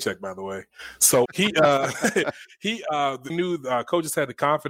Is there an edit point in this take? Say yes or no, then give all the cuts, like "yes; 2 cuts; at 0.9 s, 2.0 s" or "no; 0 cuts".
yes; 2 cuts; at 1.3 s, 3.3 s